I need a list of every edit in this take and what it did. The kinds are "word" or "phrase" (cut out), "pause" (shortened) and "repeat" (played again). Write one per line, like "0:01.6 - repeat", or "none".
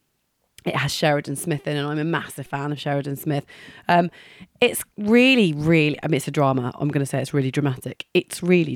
none